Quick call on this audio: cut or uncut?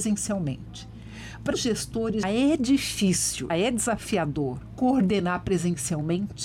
cut